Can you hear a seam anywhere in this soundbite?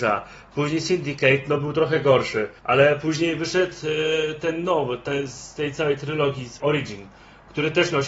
yes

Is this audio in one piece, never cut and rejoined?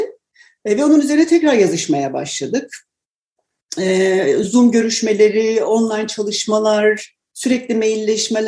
yes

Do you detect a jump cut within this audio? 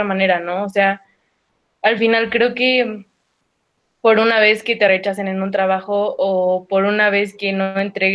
no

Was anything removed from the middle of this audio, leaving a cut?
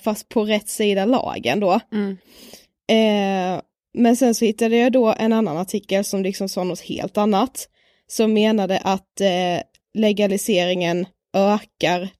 no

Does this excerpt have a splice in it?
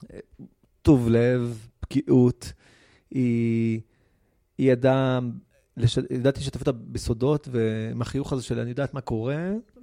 no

